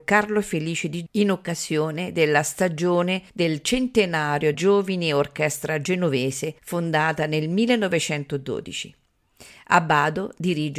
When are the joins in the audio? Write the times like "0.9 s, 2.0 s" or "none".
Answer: 1.1 s, 3.3 s, 4.5 s, 6.6 s